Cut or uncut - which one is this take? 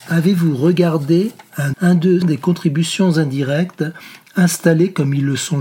cut